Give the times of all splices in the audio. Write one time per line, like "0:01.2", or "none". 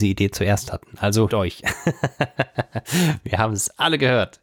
0:01.3